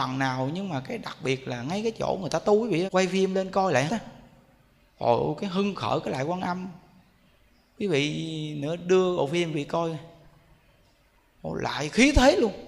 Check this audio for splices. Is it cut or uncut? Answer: cut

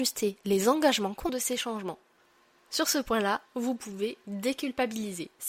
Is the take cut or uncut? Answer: cut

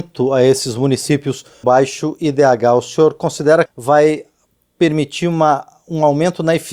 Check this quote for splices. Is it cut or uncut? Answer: cut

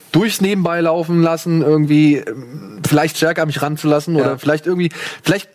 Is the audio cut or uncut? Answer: uncut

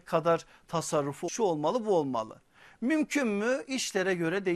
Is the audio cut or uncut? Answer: cut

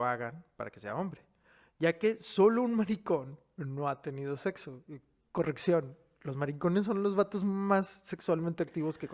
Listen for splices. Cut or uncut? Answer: uncut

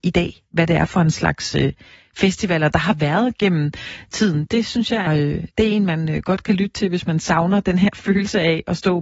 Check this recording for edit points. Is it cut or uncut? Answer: cut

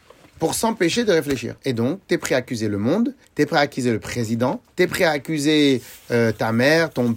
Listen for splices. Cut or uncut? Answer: cut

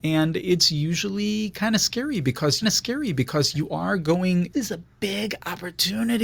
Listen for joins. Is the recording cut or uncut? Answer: cut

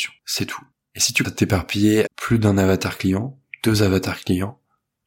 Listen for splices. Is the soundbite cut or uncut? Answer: cut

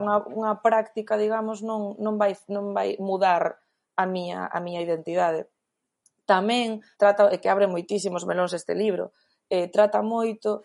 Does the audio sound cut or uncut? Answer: cut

